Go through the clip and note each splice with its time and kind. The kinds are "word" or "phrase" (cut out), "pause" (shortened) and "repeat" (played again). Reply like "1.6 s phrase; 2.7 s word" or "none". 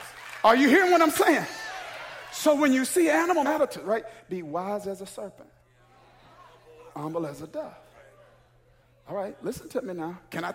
3.4 s phrase